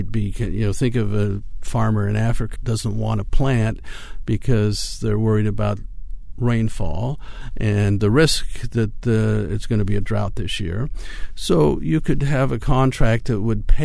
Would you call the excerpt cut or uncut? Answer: cut